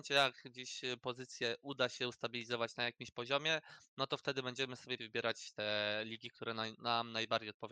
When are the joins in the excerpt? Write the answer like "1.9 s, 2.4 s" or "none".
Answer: 5.0 s